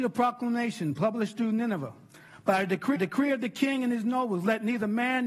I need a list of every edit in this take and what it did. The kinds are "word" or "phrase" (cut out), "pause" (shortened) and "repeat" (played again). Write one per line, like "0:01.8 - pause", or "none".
0:03.0 - repeat